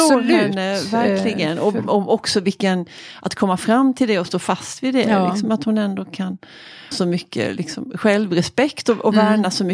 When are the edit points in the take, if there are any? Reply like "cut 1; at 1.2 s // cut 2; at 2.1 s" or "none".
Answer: cut 1; at 6.9 s